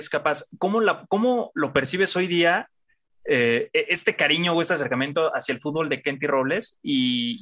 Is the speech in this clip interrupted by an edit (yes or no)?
no